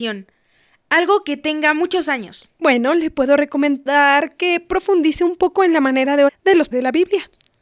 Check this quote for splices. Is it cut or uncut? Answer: cut